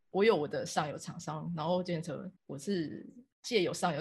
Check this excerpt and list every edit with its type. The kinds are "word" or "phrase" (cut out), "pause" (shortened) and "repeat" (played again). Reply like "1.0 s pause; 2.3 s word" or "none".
2.4 s pause